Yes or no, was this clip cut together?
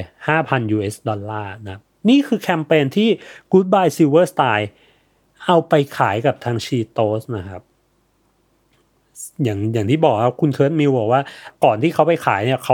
no